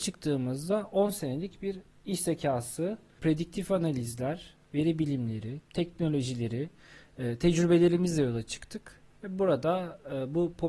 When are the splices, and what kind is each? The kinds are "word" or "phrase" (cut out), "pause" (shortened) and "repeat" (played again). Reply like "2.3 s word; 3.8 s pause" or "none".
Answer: none